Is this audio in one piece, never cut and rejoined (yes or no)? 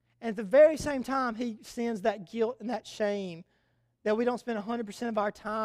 yes